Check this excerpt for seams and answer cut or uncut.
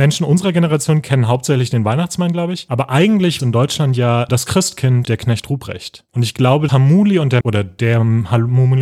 cut